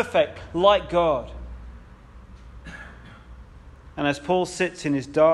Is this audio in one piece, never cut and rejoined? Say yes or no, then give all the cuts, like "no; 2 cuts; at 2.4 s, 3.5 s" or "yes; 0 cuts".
yes; 0 cuts